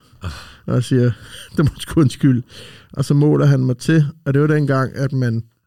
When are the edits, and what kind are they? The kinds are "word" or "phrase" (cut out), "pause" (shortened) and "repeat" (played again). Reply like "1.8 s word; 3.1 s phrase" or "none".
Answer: none